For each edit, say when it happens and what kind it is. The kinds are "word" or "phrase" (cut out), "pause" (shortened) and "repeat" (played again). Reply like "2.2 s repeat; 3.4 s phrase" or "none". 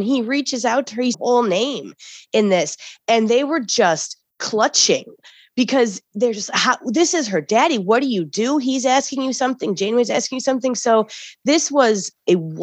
1.1 s phrase